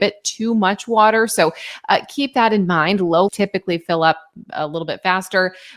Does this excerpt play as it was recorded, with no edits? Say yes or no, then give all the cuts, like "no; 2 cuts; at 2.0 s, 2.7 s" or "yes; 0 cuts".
no; 1 cut; at 3.3 s